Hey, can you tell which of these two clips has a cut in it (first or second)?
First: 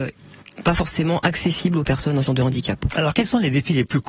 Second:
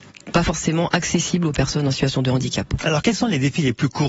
first